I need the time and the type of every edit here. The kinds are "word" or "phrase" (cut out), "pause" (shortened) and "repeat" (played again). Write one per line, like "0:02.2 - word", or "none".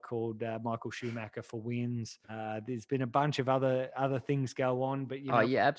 0:02.2 - pause